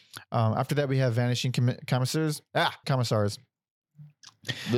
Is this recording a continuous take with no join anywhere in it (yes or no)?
no